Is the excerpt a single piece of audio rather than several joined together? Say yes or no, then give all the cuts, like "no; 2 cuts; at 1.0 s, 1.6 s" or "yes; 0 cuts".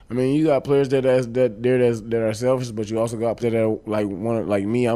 no; 1 cut; at 3.4 s